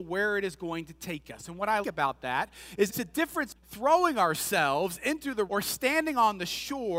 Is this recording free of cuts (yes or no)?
no